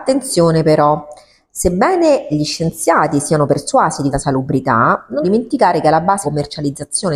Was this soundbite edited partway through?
yes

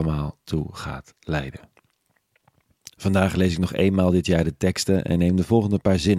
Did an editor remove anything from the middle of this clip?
no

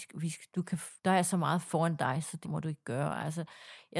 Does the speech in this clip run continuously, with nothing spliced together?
no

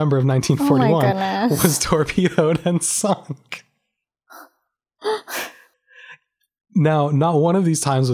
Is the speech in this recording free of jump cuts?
yes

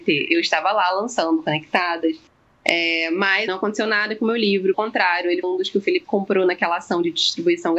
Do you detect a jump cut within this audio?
yes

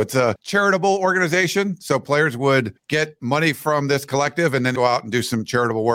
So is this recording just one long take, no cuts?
no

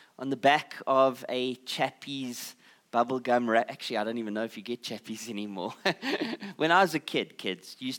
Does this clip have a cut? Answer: no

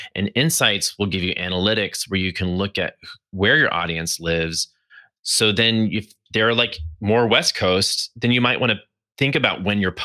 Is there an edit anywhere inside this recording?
no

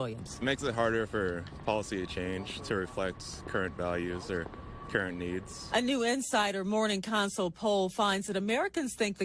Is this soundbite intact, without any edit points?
yes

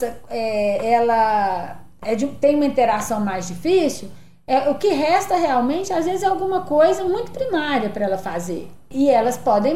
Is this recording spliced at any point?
no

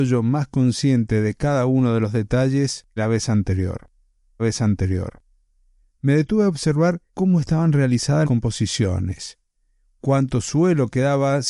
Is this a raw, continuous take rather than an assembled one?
no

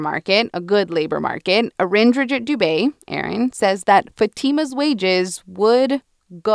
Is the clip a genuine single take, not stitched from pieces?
yes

